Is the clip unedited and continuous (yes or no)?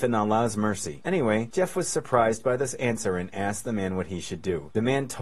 yes